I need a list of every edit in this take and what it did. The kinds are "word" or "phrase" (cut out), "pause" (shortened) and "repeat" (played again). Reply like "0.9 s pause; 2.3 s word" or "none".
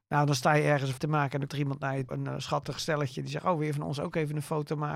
1.0 s word; 1.5 s word; 2.1 s word